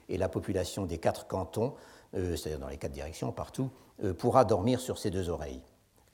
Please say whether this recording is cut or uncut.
uncut